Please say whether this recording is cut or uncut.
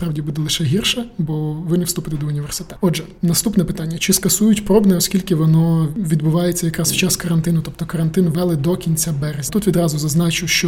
uncut